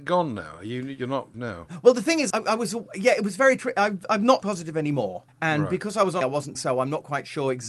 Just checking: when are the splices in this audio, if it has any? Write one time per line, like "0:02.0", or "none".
0:01.3
0:02.3
0:04.4
0:05.3
0:06.2
0:06.5